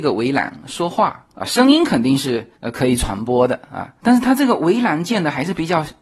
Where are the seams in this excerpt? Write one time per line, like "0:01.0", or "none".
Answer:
0:02.6